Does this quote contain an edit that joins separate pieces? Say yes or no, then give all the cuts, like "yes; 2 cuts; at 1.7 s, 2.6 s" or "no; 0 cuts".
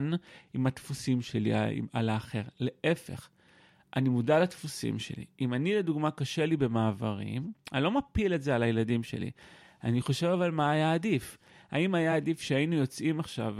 no; 0 cuts